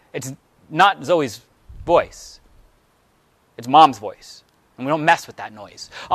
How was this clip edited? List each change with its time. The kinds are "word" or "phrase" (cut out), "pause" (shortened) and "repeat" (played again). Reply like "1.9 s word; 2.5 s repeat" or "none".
none